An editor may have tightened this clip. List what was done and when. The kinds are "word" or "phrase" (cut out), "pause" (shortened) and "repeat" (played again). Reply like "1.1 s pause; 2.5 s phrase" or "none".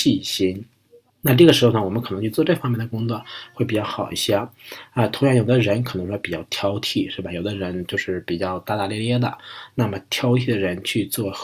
1.1 s pause